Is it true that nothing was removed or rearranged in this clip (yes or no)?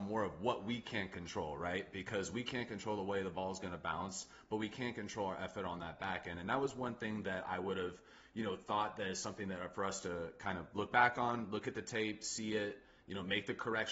yes